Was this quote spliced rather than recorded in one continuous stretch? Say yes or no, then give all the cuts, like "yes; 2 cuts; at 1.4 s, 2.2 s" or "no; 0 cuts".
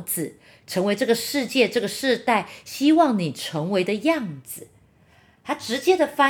no; 0 cuts